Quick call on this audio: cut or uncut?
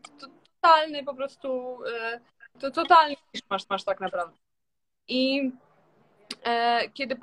cut